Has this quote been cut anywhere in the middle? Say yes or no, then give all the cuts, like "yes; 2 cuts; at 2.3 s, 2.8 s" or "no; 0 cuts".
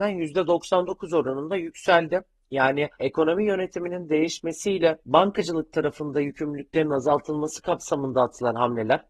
yes; 2 cuts; at 2.9 s, 5.0 s